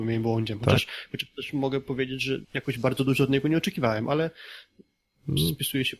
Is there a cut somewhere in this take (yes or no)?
yes